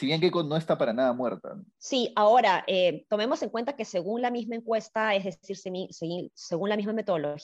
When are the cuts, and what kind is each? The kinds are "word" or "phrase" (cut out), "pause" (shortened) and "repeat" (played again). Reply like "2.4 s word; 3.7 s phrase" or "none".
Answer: 1.7 s pause